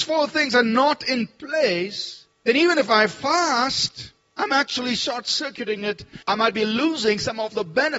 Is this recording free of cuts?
no; 1 cut; at 6.2 s

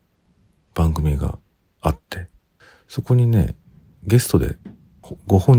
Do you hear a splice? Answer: no; 0 cuts

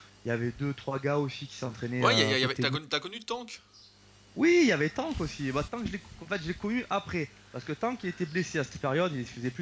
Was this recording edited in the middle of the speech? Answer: yes; 1 cut; at 5.7 s

